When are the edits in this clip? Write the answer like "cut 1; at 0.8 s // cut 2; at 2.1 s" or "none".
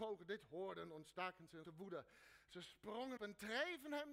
cut 1; at 1.6 s // cut 2; at 3.2 s

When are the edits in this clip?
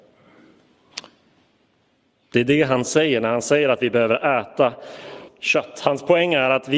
cut 1; at 5.3 s

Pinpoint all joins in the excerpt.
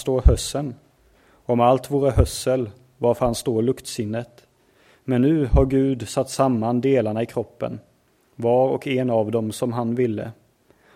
none

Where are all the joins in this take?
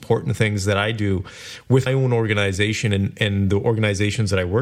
cut 1; at 1.9 s

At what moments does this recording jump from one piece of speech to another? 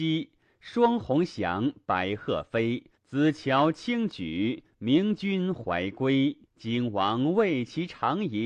cut 1; at 2.9 s // cut 2; at 6.5 s

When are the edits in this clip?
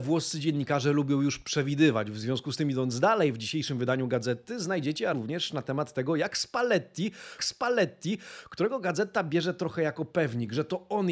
cut 1; at 5.1 s // cut 2; at 7.4 s

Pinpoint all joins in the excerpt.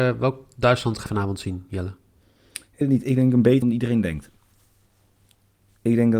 cut 1; at 1.1 s // cut 2; at 2.8 s // cut 3; at 3.6 s

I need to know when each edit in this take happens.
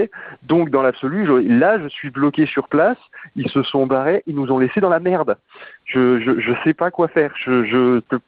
none

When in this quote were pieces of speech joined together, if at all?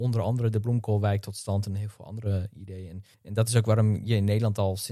cut 1; at 3.1 s

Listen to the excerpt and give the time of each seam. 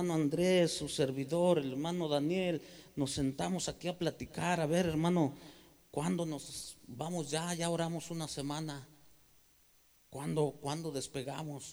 none

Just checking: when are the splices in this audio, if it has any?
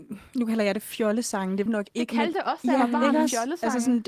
cut 1; at 1.7 s // cut 2; at 2.3 s

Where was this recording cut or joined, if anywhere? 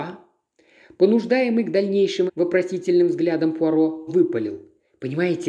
cut 1; at 2.3 s // cut 2; at 4.1 s

